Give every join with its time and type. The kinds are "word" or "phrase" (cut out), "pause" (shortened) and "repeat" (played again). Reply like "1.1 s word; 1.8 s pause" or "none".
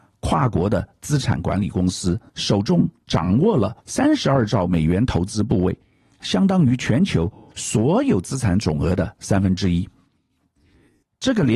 2.3 s pause; 3.8 s pause